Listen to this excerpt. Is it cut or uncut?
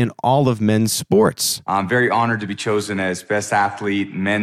uncut